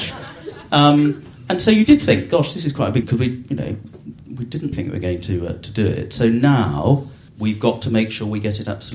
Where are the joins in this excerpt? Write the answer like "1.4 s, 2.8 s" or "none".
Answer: 3.0 s, 4.7 s, 7.3 s